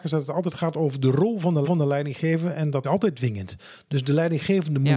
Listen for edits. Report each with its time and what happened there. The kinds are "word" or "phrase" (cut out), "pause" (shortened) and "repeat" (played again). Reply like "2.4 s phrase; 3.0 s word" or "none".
1.6 s repeat; 2.8 s phrase